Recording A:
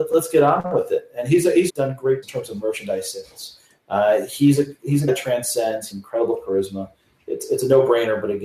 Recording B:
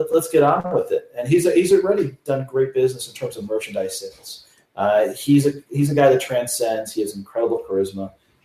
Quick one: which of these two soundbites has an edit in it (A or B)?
A